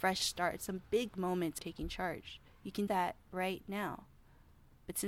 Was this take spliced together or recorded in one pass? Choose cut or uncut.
cut